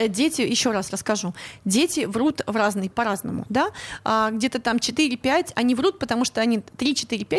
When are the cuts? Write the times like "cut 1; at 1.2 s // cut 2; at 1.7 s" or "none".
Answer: cut 1; at 2.9 s